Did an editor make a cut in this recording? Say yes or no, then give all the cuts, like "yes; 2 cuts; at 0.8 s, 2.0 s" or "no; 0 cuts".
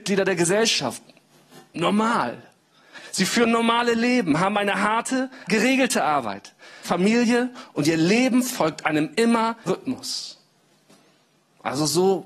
yes; 3 cuts; at 5.5 s, 6.8 s, 9.7 s